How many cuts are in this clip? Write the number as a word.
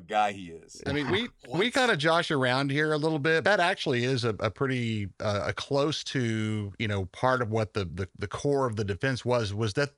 one